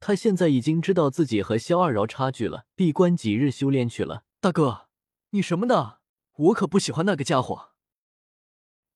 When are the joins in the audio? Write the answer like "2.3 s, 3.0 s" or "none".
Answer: 2.7 s, 4.3 s, 6.1 s